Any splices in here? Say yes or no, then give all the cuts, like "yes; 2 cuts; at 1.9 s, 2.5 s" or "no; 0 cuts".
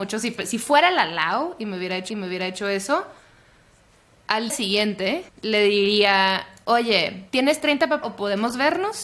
yes; 5 cuts; at 2.1 s, 4.5 s, 5.3 s, 7.3 s, 8.0 s